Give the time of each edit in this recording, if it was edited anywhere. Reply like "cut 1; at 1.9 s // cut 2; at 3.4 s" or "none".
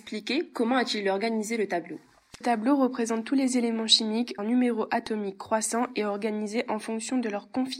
cut 1; at 2.4 s // cut 2; at 4.4 s